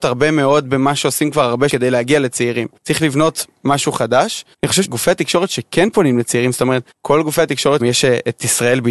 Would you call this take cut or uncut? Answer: cut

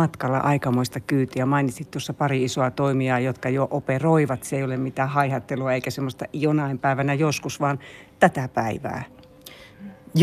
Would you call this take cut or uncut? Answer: uncut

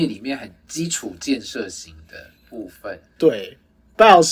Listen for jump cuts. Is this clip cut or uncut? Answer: cut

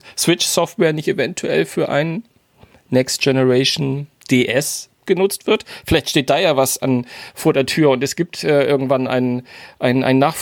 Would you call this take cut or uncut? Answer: uncut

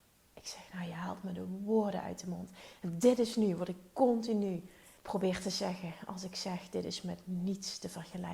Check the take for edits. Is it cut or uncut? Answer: cut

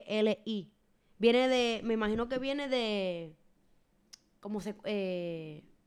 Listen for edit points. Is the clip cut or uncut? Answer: uncut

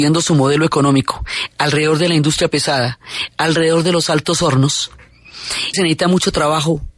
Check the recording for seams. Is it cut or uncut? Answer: cut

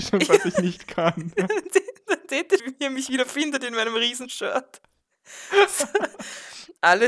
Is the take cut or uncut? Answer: cut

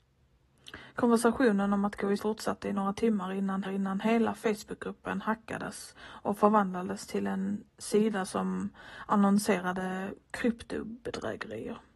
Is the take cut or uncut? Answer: cut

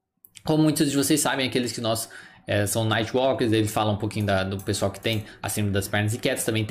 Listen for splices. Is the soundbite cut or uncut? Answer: uncut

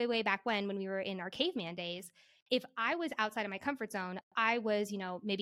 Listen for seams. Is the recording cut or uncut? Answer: uncut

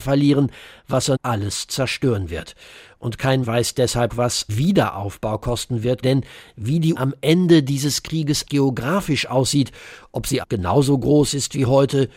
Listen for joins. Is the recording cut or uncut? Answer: cut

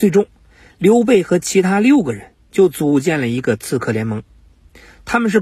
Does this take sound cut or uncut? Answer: uncut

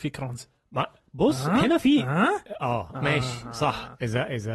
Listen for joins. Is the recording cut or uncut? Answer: uncut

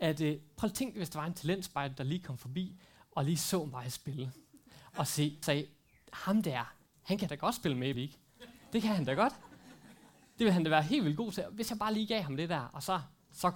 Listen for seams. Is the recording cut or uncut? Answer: cut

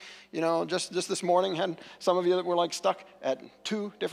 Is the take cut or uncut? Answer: uncut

